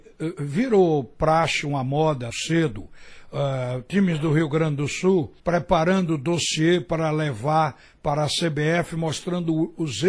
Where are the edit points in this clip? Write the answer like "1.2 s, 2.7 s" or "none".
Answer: 2.3 s, 5.4 s